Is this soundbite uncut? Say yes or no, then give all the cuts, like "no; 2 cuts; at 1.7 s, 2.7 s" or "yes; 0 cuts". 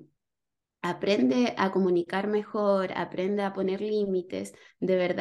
yes; 0 cuts